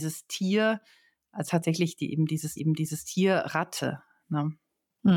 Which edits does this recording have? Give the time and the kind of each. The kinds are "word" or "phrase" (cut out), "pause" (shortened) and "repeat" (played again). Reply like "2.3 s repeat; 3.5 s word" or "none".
1.4 s word; 2.6 s repeat